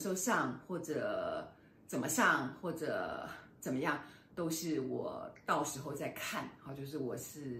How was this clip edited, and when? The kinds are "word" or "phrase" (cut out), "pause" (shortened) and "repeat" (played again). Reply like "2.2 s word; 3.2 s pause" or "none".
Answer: none